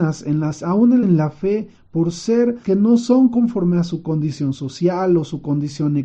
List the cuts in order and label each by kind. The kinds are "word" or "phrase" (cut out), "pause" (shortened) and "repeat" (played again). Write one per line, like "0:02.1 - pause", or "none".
0:01.0 - phrase
0:02.6 - word